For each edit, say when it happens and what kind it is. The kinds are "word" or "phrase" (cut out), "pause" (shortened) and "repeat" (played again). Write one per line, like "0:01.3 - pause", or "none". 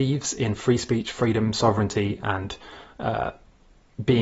none